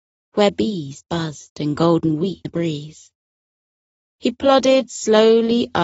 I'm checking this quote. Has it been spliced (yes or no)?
yes